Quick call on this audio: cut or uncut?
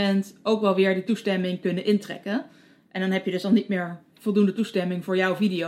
uncut